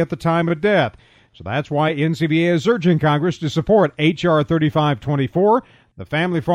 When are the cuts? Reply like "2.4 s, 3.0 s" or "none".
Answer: none